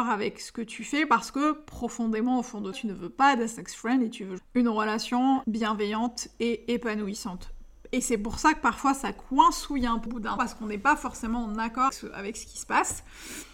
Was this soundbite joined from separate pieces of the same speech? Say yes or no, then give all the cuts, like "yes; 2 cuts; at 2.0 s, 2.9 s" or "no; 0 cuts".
yes; 6 cuts; at 2.7 s, 4.4 s, 5.4 s, 10.1 s, 10.4 s, 11.9 s